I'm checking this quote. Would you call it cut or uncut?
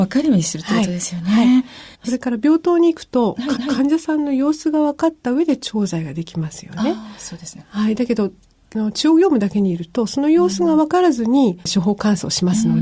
cut